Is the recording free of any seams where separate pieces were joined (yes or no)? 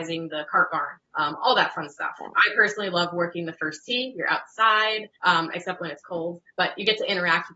no